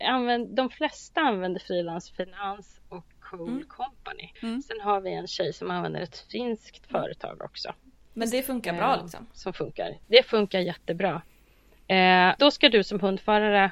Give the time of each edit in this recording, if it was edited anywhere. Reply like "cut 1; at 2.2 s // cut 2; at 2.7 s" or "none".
cut 1; at 3.1 s // cut 2; at 4.4 s // cut 3; at 10.0 s // cut 4; at 12.4 s